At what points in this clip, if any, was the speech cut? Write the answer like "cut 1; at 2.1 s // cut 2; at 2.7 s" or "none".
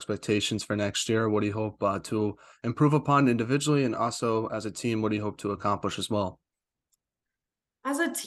none